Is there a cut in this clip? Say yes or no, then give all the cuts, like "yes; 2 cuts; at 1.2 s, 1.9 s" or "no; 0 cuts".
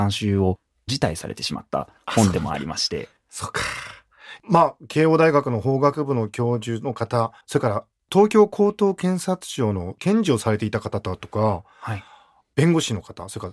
yes; 1 cut; at 7.4 s